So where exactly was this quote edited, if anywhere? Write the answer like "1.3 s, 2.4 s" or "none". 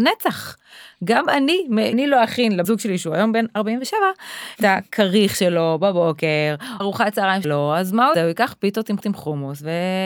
1.9 s, 2.6 s, 4.6 s, 6.8 s, 7.4 s, 8.1 s, 9.0 s